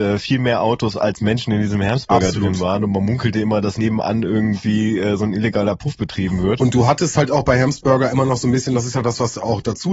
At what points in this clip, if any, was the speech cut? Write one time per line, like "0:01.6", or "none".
none